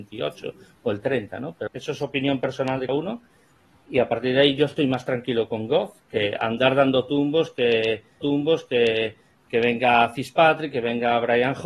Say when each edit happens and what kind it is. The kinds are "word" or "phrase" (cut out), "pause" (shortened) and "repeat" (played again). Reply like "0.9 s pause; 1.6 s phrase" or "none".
1.7 s word; 2.9 s word; 8.2 s repeat

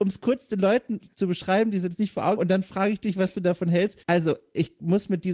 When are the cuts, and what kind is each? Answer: 2.4 s word; 4.0 s pause

